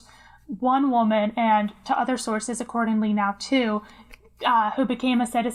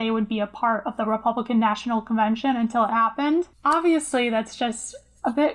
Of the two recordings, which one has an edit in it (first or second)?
second